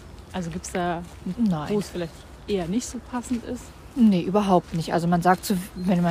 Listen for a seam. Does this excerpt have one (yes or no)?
yes